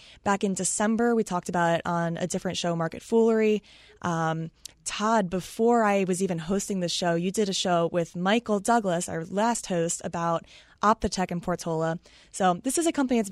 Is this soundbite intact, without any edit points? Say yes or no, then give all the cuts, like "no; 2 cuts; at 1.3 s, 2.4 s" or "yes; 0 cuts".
yes; 0 cuts